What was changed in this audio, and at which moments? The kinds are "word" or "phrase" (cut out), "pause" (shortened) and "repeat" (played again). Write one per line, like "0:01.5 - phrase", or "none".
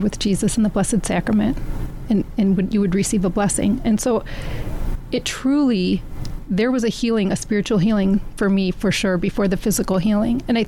none